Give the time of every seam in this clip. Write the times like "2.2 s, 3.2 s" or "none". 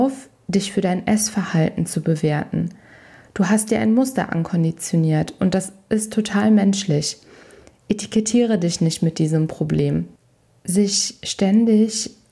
none